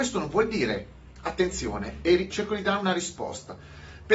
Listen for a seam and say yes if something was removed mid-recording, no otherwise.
yes